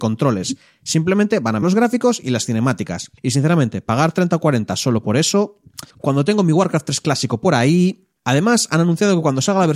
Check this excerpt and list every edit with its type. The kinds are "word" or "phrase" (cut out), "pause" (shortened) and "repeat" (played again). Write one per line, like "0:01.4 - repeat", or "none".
0:01.6 - word
0:03.2 - pause
0:05.9 - pause
0:08.2 - pause

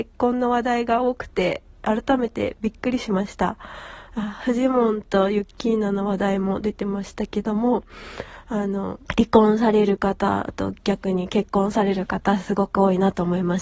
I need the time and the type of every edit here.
0:09.1 - pause

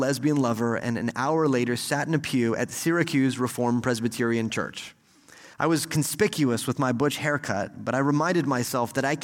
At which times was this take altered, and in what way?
0:05.5 - pause

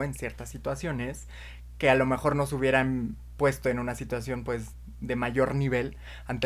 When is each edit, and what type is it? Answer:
none

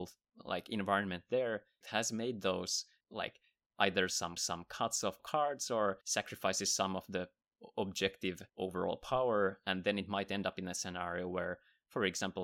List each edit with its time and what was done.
0:01.8 - phrase
0:03.0 - word
0:04.4 - repeat
0:05.2 - word
0:06.0 - pause
0:08.5 - pause

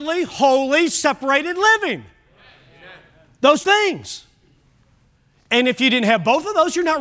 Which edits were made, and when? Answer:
0:03.6 - word

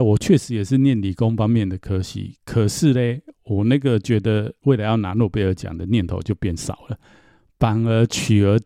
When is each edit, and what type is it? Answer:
0:03.4 - pause
0:04.6 - pause

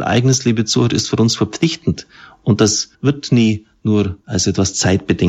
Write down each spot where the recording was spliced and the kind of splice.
0:02.9 - pause
0:04.2 - pause

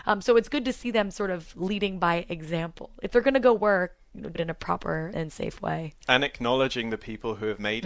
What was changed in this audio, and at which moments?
0:04.3 - word
0:05.1 - word

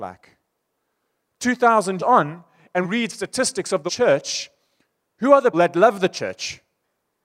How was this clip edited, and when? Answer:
0:02.0 - word
0:02.8 - word
0:03.9 - word
0:05.5 - word

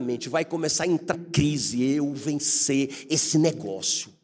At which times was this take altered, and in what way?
0:01.1 - word
0:02.2 - word

